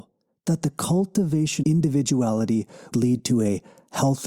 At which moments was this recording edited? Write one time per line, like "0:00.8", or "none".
0:01.6
0:02.9